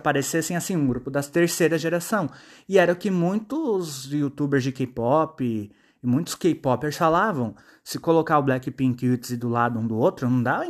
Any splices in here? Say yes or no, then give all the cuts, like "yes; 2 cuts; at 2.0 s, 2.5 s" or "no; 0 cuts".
no; 0 cuts